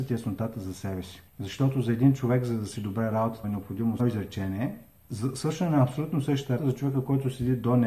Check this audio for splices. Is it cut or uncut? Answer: cut